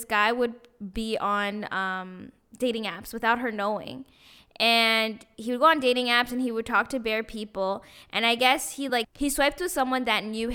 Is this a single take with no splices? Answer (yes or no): yes